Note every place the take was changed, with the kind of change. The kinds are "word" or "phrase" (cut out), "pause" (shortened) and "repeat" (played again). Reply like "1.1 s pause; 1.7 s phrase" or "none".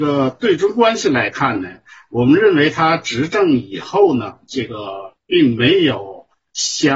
none